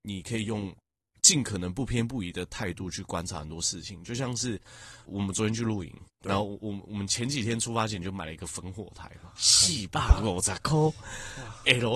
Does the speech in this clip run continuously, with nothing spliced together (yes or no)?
no